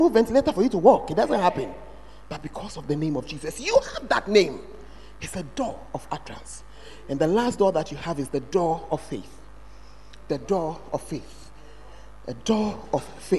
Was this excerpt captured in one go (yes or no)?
yes